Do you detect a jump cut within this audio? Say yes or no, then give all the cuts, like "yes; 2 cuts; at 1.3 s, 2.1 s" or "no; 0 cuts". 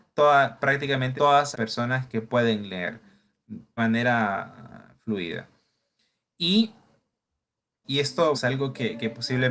yes; 6 cuts; at 1.2 s, 1.5 s, 2.1 s, 3.8 s, 7.8 s, 8.3 s